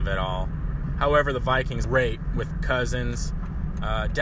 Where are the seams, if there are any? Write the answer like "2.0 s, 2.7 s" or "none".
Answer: 1.8 s, 2.5 s